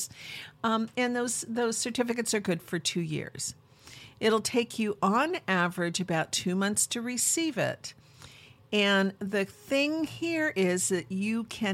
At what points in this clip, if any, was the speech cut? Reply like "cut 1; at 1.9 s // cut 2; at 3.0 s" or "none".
none